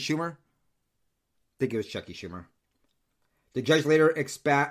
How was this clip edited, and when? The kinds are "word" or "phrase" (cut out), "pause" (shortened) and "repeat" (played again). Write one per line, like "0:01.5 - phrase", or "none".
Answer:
none